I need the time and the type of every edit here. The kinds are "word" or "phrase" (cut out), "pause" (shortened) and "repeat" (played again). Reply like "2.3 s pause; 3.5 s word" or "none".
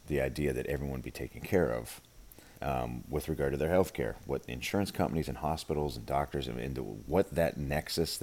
2.5 s pause